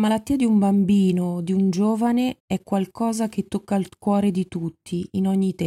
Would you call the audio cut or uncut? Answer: cut